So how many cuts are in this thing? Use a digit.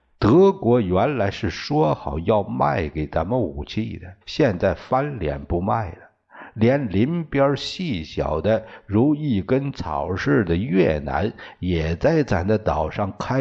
1